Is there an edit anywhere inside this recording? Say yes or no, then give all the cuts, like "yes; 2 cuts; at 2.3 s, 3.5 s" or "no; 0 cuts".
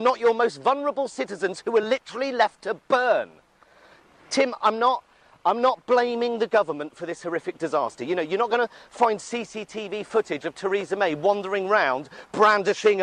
no; 0 cuts